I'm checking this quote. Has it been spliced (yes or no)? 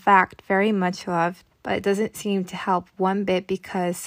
yes